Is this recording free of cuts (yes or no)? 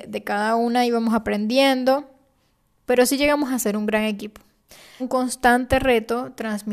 no